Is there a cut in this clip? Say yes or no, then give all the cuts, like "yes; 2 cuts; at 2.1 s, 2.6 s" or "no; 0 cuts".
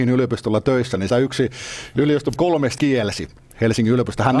yes; 3 cuts; at 1.1 s, 2.4 s, 2.8 s